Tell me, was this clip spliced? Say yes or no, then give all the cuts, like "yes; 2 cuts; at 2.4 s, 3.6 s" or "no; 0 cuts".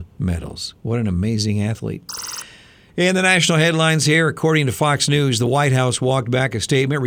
no; 0 cuts